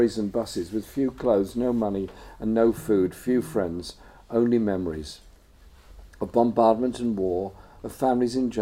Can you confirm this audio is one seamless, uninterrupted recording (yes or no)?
yes